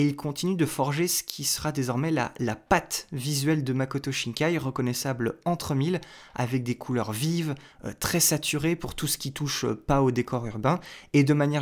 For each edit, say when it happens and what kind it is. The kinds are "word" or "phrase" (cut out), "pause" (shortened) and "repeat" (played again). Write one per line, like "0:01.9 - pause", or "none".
none